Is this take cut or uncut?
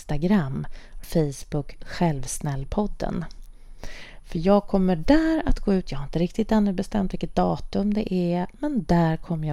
cut